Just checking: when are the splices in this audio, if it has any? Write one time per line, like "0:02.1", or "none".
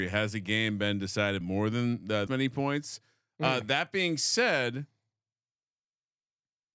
0:01.4
0:02.3